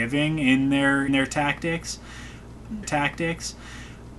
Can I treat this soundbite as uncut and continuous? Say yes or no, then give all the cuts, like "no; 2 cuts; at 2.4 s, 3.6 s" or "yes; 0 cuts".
no; 2 cuts; at 1.1 s, 2.8 s